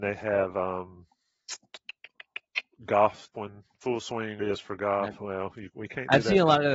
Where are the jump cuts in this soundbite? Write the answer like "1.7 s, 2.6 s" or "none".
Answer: 3.3 s, 3.7 s, 4.4 s, 5.2 s